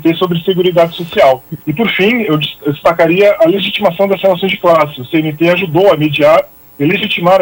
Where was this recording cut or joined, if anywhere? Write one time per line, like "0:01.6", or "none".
0:01.6